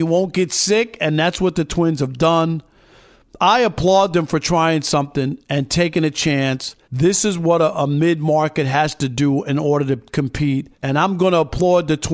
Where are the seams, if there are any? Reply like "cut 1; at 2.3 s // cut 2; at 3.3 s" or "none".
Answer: cut 1; at 6.8 s // cut 2; at 10.7 s